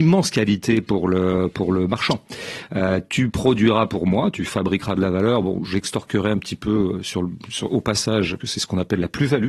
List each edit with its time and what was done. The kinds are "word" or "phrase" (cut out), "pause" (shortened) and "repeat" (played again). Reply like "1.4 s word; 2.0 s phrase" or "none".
8.4 s word